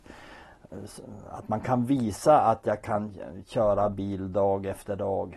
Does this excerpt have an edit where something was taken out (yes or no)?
no